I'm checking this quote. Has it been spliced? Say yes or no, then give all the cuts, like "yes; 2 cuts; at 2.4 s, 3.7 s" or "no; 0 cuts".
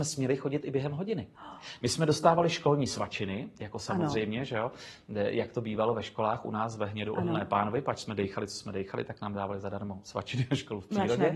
no; 0 cuts